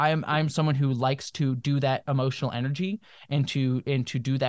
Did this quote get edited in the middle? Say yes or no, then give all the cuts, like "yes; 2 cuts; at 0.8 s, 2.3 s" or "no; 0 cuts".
no; 0 cuts